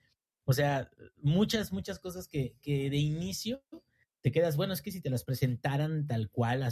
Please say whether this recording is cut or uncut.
uncut